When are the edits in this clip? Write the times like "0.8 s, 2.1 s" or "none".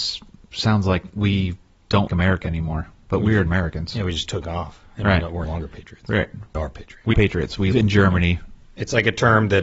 2.1 s, 3.5 s, 5.4 s, 6.5 s, 7.1 s, 7.7 s